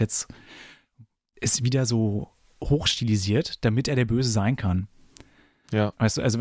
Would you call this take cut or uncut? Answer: uncut